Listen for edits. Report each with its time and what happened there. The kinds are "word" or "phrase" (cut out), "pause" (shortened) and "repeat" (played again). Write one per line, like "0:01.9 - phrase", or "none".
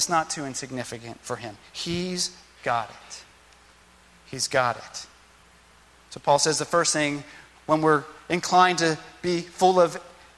none